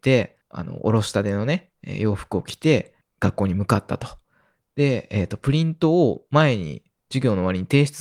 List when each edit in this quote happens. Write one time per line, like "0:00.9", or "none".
0:01.7